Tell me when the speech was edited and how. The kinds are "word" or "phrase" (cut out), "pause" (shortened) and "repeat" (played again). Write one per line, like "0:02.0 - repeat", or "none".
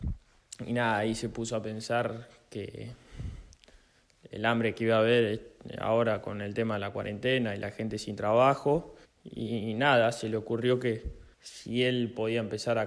0:09.0 - pause
0:11.3 - pause